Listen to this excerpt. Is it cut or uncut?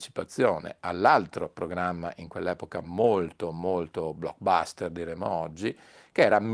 uncut